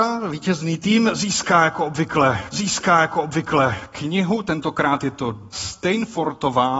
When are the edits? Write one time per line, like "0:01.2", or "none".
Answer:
0:02.5
0:05.5